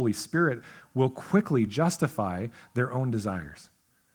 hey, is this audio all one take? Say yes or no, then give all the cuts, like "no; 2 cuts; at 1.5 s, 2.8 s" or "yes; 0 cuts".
yes; 0 cuts